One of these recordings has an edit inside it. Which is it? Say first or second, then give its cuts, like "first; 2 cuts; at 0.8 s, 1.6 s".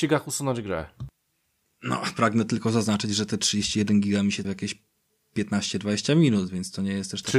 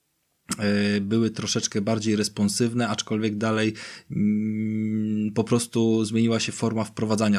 first; 1 cut; at 4.4 s